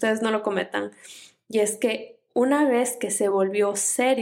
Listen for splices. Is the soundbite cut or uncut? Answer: uncut